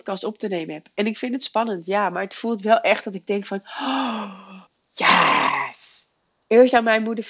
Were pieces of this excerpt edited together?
yes; 1 cut; at 4.7 s

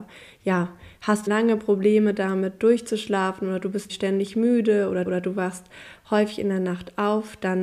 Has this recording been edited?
yes; 3 cuts; at 1.3 s, 3.9 s, 5.1 s

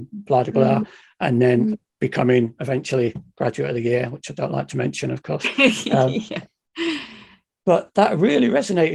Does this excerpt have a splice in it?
no; 0 cuts

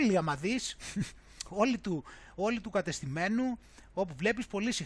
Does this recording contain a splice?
no; 0 cuts

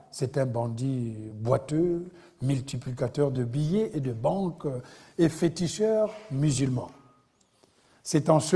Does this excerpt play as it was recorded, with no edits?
yes; 0 cuts

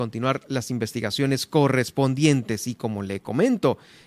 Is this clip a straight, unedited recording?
yes; 0 cuts

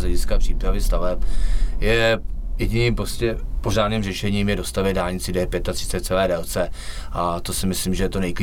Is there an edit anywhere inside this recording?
no; 0 cuts

